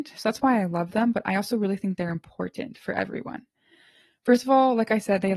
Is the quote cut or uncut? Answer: uncut